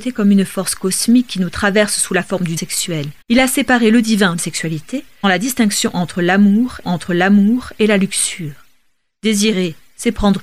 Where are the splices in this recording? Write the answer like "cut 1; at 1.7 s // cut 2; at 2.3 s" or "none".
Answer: cut 1; at 2.6 s // cut 2; at 3.2 s // cut 3; at 4.4 s // cut 4; at 5.2 s // cut 5; at 6.8 s